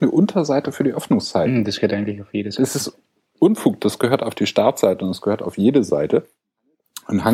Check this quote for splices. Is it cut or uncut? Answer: uncut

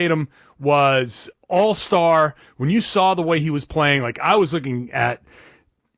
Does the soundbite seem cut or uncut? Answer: cut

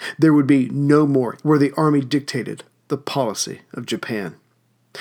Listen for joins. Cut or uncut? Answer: cut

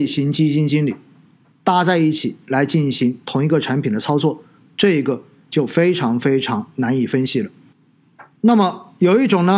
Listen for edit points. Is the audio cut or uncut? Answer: uncut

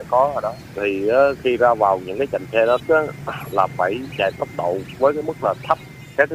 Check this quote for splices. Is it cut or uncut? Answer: cut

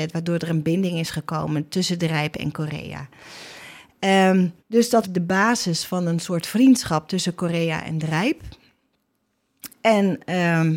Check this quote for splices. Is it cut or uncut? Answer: cut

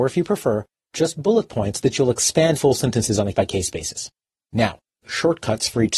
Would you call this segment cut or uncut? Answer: cut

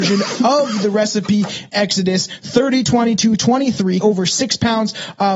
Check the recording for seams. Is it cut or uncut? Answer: cut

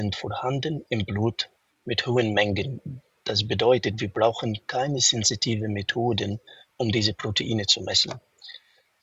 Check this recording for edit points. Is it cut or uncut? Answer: uncut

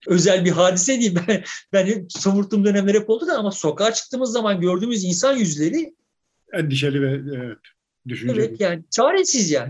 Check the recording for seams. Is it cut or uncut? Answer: uncut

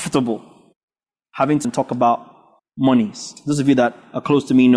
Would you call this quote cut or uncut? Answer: cut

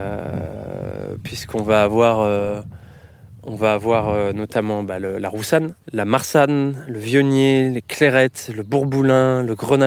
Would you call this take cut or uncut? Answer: cut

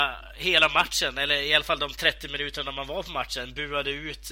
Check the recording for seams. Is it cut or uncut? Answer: uncut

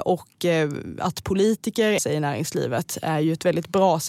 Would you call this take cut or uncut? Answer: cut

